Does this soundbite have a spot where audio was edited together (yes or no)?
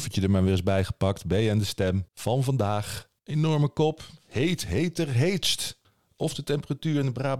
yes